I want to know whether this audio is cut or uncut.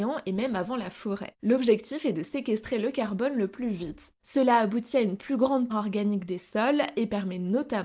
cut